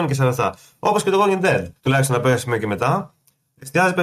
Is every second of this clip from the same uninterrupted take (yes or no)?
no